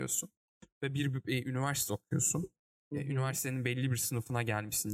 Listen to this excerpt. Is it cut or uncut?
uncut